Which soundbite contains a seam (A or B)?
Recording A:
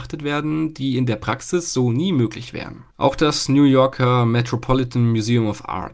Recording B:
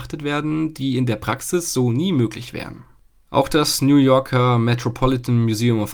A